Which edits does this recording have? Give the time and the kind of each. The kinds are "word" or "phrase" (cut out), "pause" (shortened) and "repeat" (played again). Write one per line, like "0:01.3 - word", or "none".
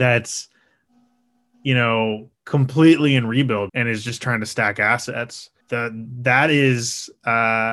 0:03.7 - word
0:05.6 - pause